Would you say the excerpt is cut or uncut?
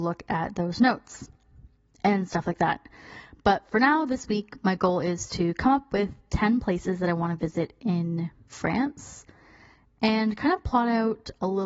uncut